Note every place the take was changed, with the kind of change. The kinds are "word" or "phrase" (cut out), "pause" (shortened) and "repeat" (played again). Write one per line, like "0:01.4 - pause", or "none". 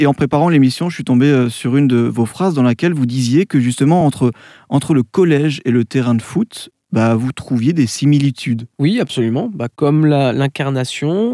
none